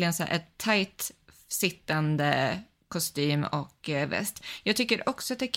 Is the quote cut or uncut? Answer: uncut